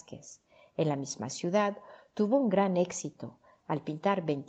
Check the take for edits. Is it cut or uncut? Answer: uncut